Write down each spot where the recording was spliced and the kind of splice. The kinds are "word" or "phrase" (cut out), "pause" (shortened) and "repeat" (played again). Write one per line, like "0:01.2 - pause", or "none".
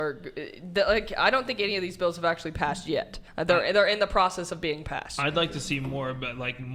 0:03.3 - pause

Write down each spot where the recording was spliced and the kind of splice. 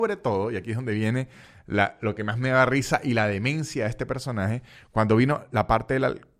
none

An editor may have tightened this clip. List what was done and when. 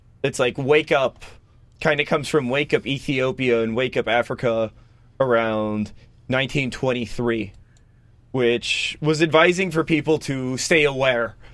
none

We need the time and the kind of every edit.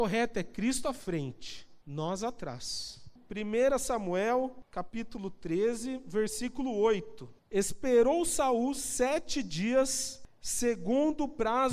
0:01.8 - pause
0:07.4 - pause

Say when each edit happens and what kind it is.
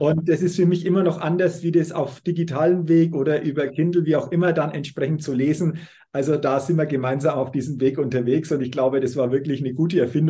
none

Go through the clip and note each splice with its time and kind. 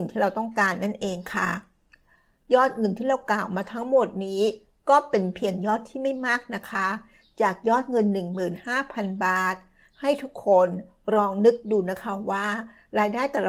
none

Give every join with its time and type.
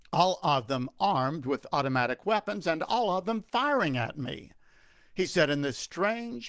none

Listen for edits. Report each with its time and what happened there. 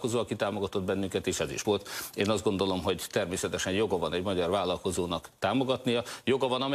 0:01.6 - word

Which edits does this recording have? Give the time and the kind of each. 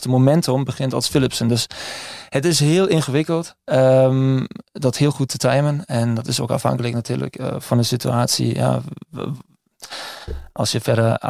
none

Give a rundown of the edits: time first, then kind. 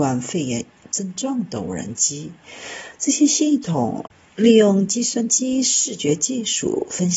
0:04.1 - pause

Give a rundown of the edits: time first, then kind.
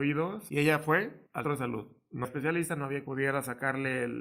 0:01.4 - word
0:02.2 - word
0:03.0 - word

